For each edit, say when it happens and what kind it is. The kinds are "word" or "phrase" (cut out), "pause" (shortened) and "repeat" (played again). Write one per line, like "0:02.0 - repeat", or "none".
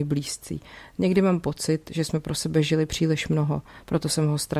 none